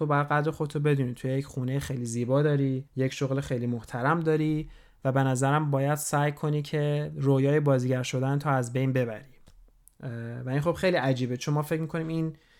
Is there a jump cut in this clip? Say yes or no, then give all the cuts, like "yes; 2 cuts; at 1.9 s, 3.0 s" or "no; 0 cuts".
yes; 1 cut; at 2.9 s